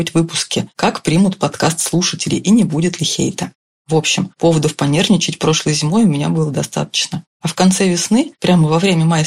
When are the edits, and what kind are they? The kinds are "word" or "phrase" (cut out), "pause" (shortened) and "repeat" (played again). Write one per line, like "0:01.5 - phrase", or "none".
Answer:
none